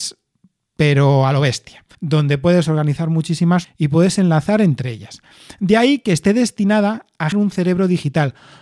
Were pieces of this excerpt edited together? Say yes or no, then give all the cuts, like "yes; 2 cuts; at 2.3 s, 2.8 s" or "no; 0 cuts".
yes; 3 cuts; at 1.9 s, 3.6 s, 7.3 s